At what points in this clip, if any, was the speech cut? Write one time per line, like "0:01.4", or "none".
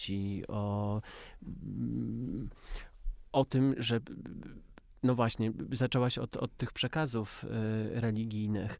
none